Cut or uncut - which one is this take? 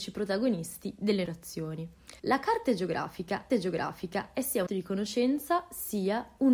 cut